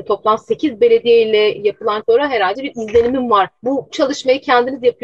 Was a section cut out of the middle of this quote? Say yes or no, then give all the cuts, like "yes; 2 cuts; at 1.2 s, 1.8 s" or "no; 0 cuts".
yes; 3 cuts; at 2.0 s, 2.6 s, 3.9 s